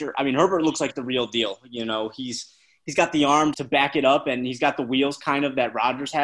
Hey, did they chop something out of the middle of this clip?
yes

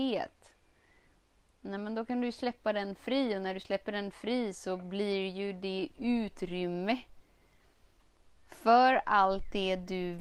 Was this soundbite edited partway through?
no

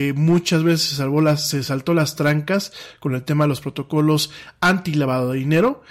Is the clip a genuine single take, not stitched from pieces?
yes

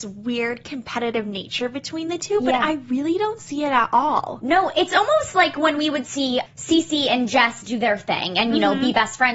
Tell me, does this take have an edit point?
yes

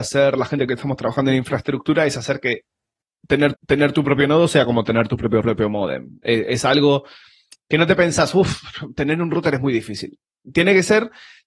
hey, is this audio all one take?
no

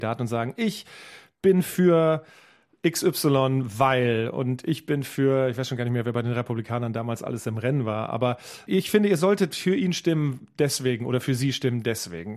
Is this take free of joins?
yes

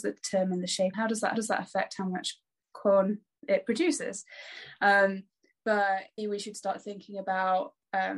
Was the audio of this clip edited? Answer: yes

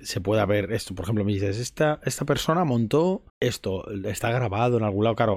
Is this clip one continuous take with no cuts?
no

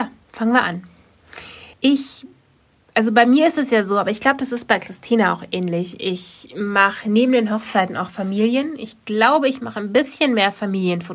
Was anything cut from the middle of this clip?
yes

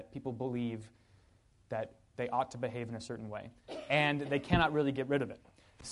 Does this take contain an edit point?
no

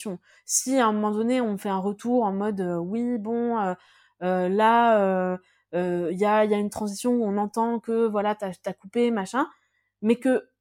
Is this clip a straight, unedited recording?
yes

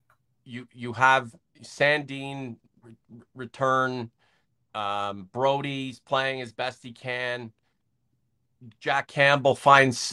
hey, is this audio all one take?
yes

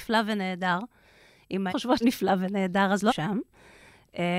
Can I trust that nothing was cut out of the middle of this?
no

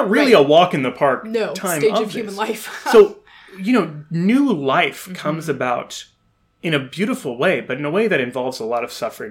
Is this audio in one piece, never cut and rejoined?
yes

